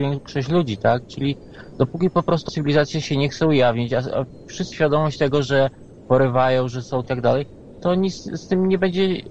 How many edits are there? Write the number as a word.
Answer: three